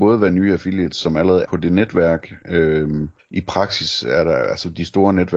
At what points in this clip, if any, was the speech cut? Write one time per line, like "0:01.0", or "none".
0:01.4
0:03.2

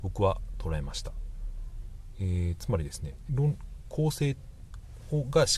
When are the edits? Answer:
0:03.3

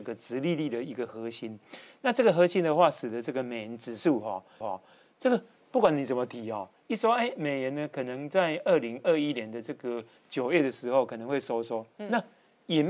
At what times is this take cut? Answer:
0:04.6

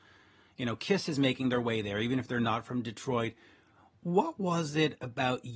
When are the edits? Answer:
none

